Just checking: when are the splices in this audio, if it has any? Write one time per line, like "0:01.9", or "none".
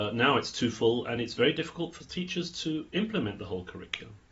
none

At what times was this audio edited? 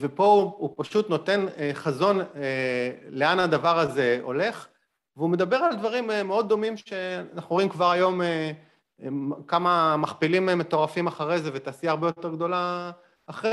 none

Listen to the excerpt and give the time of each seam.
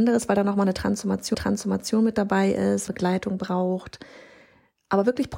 0:01.3
0:02.9

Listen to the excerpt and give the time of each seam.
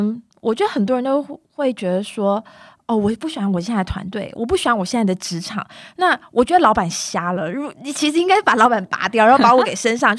none

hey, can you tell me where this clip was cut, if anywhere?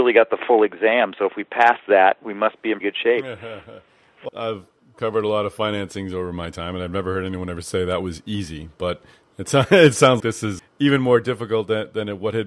0:02.8
0:04.3
0:10.2
0:10.6

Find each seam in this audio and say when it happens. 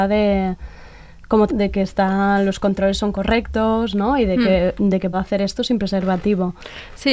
0:01.5
0:05.1

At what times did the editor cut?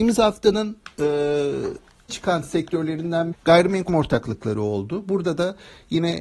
0:02.1
0:03.3
0:03.9

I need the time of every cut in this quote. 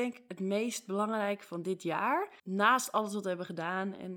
0:02.4

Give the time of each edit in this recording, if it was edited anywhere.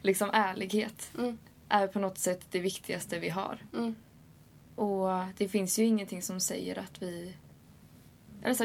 none

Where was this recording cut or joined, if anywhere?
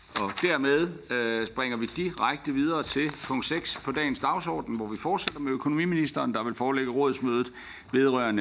none

